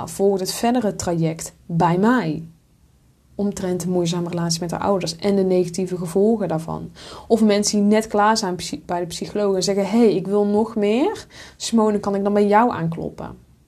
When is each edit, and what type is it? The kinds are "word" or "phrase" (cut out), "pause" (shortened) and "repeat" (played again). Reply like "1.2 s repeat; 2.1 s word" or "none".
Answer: none